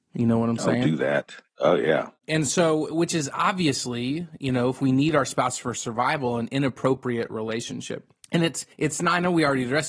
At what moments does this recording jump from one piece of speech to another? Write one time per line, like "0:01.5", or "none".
0:08.2
0:08.7